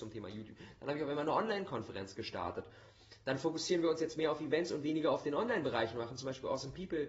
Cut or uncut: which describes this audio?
uncut